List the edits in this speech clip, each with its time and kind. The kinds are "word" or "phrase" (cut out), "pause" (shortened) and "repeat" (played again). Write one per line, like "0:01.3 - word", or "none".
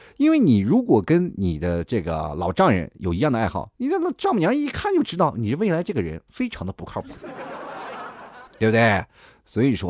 0:03.8 - pause
0:08.5 - pause

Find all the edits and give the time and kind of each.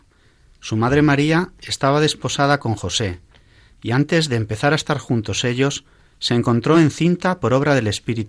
none

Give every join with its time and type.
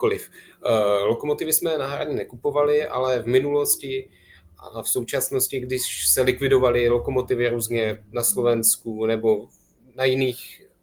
none

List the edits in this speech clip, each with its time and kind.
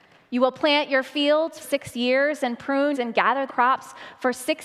0:01.6 - word
0:02.9 - phrase
0:03.5 - word

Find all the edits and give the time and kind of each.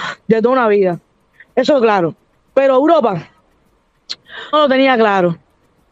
0:01.8 - word
0:04.5 - word

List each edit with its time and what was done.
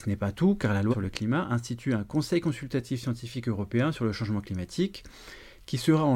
0:00.9 - word

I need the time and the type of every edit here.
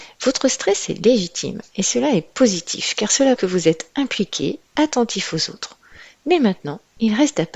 0:03.4 - word

